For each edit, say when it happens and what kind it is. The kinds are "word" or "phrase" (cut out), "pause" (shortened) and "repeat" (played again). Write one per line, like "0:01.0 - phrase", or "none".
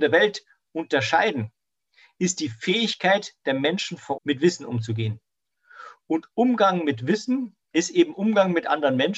0:04.2 - word
0:07.6 - pause

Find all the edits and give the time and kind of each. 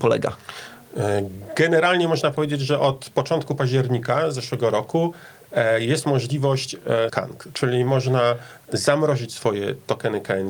0:07.1 - word

